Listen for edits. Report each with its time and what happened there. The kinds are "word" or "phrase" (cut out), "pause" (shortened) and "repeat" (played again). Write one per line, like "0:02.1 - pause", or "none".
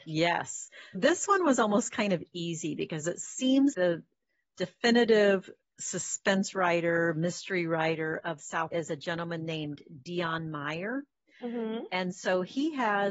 0:00.9 - word
0:03.7 - word
0:08.7 - word